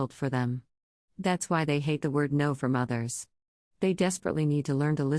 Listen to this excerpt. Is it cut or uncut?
uncut